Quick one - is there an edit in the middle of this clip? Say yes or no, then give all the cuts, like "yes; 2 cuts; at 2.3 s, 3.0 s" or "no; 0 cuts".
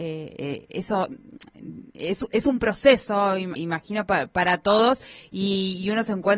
yes; 1 cut; at 3.6 s